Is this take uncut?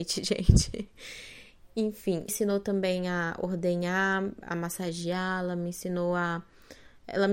no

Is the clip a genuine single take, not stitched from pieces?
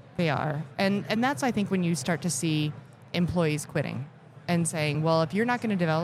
yes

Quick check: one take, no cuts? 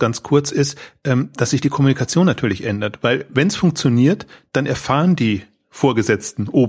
yes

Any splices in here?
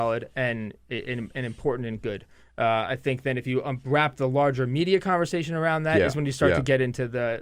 no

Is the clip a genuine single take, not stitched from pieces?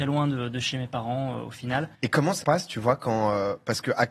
no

